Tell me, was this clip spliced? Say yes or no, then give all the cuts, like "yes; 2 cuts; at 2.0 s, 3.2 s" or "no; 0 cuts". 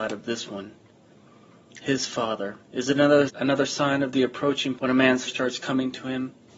yes; 4 cuts; at 2.6 s, 3.3 s, 4.8 s, 5.3 s